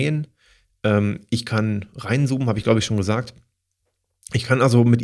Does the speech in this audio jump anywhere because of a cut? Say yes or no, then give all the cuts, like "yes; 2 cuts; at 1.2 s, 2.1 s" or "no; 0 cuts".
no; 0 cuts